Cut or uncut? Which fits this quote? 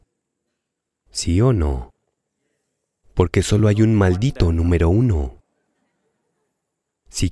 uncut